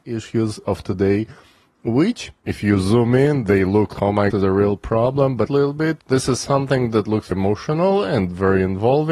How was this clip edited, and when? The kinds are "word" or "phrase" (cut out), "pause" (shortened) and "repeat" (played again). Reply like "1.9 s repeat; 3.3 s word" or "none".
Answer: 4.0 s word; 4.3 s phrase; 5.5 s phrase; 7.3 s word